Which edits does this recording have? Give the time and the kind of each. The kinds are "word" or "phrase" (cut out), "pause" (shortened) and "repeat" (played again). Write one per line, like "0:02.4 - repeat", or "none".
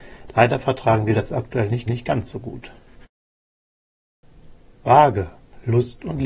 0:01.9 - repeat